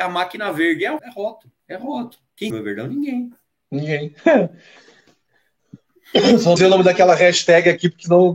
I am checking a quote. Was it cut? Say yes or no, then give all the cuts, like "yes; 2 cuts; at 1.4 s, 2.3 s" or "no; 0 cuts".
yes; 4 cuts; at 1.0 s, 1.6 s, 2.5 s, 6.6 s